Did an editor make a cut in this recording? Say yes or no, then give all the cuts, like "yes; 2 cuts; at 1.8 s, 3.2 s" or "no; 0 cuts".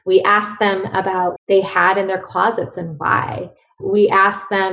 yes; 1 cut; at 1.4 s